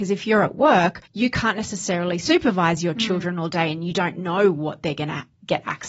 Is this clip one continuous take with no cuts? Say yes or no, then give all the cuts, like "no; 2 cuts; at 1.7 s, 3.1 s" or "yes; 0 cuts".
no; 1 cut; at 1.1 s